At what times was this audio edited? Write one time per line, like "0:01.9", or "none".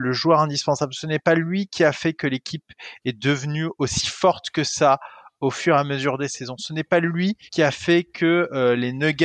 0:07.5